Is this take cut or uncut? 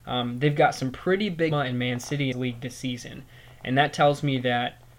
cut